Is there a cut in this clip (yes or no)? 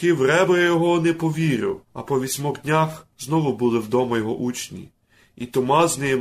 yes